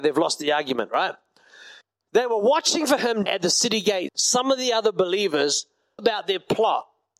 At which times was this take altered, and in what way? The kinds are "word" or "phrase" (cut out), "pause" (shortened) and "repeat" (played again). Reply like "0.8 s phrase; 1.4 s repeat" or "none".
1.8 s pause; 3.3 s phrase; 4.1 s word; 6.0 s word